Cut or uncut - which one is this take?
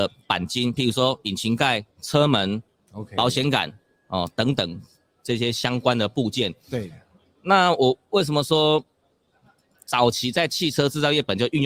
cut